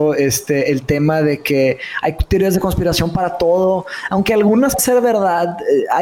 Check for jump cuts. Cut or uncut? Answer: cut